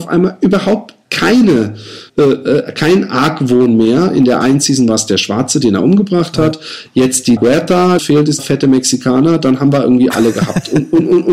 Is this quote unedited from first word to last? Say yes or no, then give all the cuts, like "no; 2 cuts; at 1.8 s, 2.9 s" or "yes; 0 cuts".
no; 4 cuts; at 2.1 s, 7.4 s, 8.0 s, 8.4 s